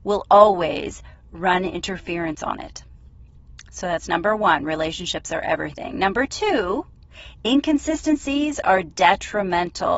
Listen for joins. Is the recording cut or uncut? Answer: uncut